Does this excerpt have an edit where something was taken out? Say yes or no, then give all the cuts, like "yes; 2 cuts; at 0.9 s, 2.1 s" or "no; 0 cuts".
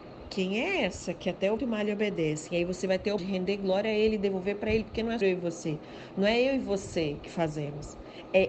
yes; 3 cuts; at 1.6 s, 3.2 s, 5.2 s